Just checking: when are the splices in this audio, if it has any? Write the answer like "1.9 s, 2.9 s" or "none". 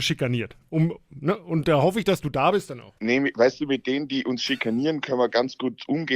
3.0 s